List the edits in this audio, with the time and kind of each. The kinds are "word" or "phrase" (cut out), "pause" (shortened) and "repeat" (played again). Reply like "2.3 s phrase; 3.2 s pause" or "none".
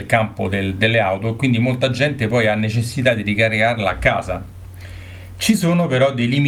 none